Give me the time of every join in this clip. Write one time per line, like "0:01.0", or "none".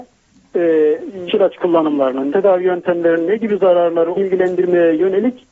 0:01.3
0:02.3
0:04.1